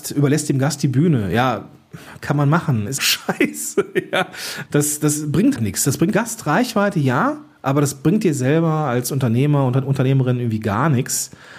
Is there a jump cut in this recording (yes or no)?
yes